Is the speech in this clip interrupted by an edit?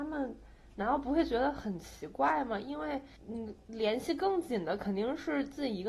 yes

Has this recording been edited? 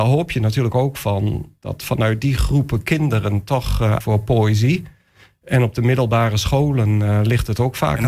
yes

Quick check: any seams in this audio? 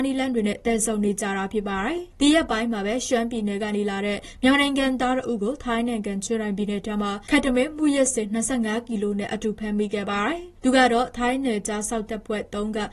yes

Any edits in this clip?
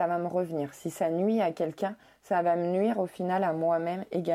no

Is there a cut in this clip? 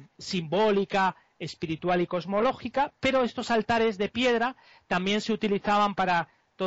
no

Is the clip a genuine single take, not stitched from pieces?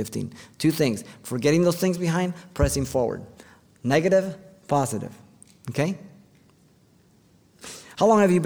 yes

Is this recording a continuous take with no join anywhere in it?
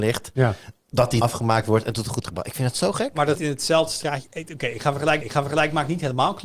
no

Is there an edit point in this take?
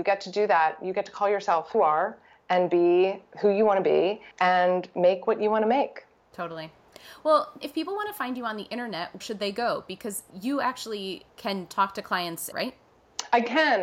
yes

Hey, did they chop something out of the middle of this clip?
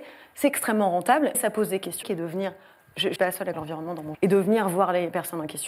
yes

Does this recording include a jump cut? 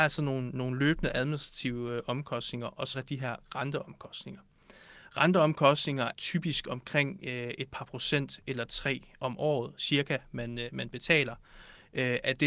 yes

